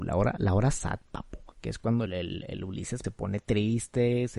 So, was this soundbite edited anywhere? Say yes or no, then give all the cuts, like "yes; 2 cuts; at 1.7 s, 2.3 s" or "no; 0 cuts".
yes; 3 cuts; at 1.5 s, 2.1 s, 3.0 s